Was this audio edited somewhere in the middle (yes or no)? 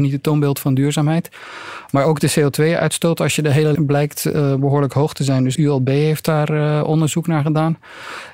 yes